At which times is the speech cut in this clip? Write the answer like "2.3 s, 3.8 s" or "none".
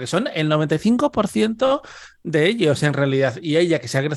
none